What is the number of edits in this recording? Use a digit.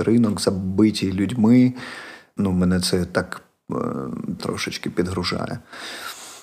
2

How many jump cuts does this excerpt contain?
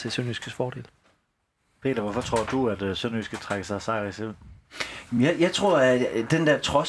0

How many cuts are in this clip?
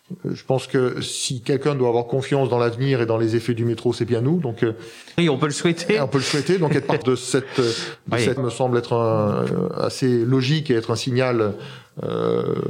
3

